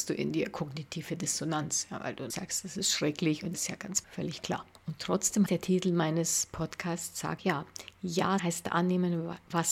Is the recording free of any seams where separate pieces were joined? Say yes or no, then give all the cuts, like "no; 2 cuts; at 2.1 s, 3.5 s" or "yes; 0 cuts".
no; 7 cuts; at 2.3 s, 3.5 s, 4.0 s, 4.7 s, 5.5 s, 7.4 s, 8.4 s